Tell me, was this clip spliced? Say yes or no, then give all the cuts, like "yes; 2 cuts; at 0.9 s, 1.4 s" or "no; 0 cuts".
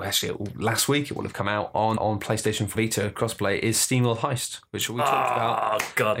yes; 2 cuts; at 2.0 s, 2.7 s